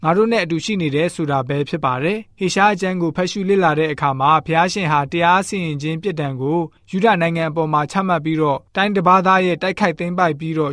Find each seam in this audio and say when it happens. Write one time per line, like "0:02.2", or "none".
0:02.3
0:06.8
0:08.7